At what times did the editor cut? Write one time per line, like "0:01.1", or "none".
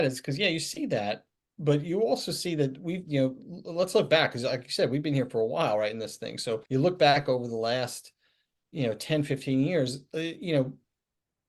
0:06.7

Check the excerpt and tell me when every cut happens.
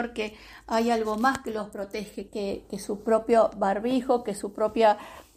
0:02.3

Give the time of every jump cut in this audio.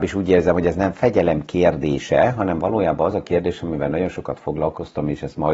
none

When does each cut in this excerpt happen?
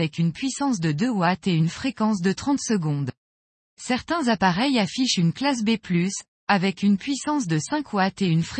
none

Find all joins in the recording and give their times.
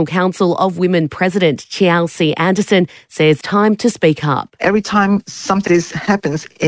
0:03.4
0:05.7

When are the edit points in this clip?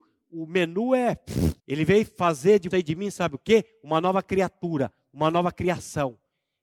0:01.6
0:02.7

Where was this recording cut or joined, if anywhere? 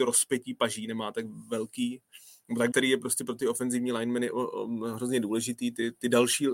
0:02.7

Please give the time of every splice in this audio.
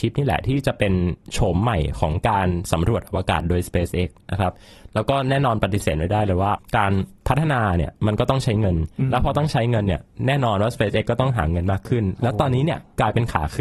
none

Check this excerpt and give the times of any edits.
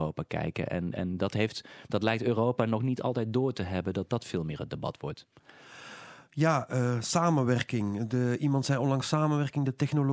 none

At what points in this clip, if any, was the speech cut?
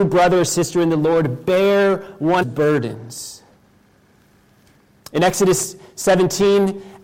0:02.4

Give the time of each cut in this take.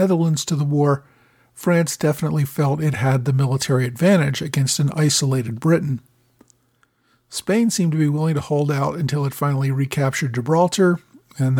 none

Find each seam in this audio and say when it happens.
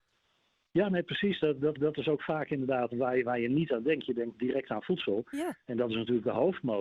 0:01.8
0:02.9

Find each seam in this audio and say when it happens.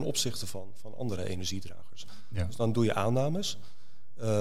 none

